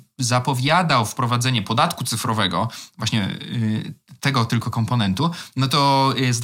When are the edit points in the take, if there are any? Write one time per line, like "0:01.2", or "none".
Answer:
none